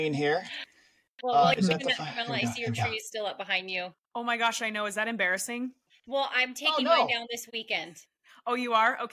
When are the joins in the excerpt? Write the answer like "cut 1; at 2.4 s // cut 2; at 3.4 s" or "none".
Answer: none